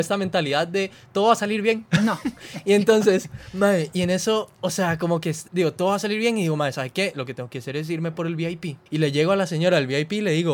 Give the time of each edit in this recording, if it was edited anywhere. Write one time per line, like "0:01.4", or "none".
0:05.5
0:08.9